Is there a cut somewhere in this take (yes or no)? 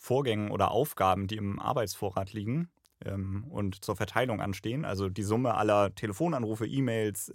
no